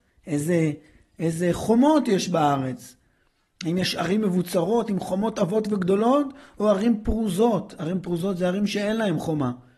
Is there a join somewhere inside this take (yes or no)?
no